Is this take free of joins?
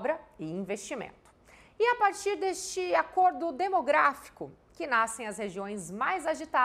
yes; 0 cuts

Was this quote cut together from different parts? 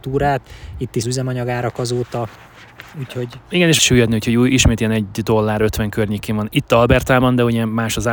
yes; 2 cuts; at 1.0 s, 3.8 s

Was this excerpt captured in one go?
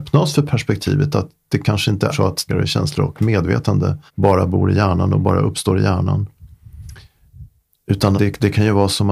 no; 4 cuts; at 2.1 s, 2.5 s, 4.1 s, 8.1 s

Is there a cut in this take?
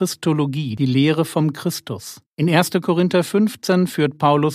yes; 1 cut; at 2.3 s

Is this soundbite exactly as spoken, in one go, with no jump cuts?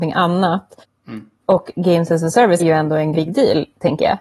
no; 3 cuts; at 1.4 s, 2.6 s, 3.1 s

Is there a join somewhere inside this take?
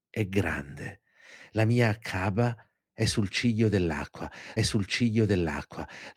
yes; 1 cut; at 4.6 s

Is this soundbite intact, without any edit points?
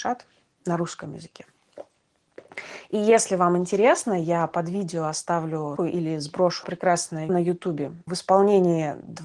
no; 4 cuts; at 5.8 s, 6.6 s, 7.3 s, 8.1 s

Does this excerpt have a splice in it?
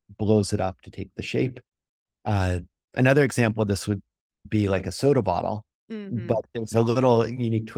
no; 0 cuts

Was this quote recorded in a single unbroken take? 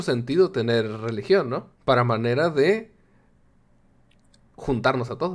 no; 1 cut; at 1.8 s

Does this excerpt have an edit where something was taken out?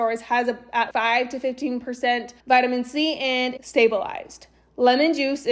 yes; 3 cuts; at 0.9 s, 2.4 s, 3.6 s

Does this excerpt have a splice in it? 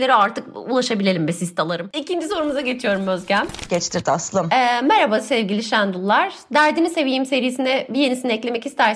no; 0 cuts

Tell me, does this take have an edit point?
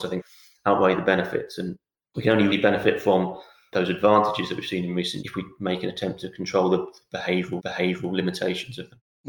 yes; 3 cuts; at 2.5 s, 5.2 s, 7.6 s

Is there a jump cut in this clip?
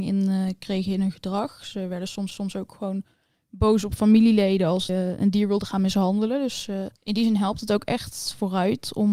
yes; 3 cuts; at 2.3 s, 4.9 s, 7.0 s

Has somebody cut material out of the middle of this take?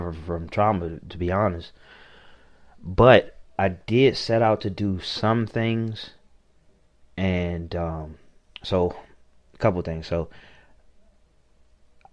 no; 0 cuts

